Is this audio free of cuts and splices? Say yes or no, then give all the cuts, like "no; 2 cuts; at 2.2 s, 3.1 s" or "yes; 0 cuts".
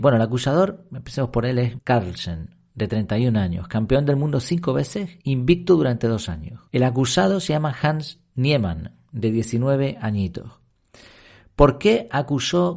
no; 3 cuts; at 1.8 s, 5.2 s, 6.7 s